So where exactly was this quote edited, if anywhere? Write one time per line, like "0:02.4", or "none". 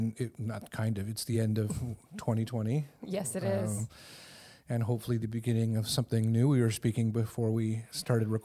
none